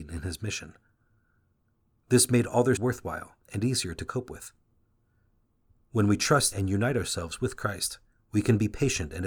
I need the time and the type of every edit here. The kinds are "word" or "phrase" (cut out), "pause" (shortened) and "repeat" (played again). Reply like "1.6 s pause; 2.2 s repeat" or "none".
2.8 s word; 3.4 s pause; 6.5 s word; 8.1 s pause